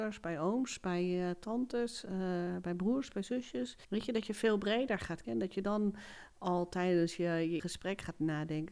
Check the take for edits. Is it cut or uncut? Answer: cut